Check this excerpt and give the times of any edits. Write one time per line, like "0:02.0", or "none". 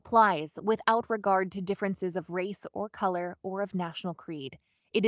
none